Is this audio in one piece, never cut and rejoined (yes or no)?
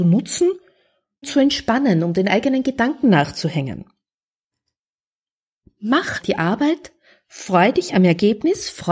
no